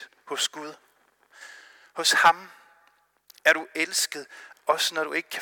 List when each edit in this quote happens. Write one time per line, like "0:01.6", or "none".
none